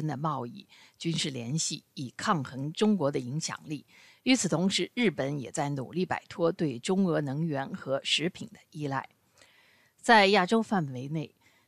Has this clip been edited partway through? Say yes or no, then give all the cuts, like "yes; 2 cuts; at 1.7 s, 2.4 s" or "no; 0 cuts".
no; 0 cuts